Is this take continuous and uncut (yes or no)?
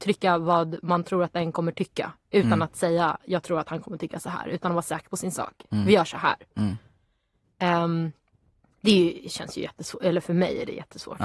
yes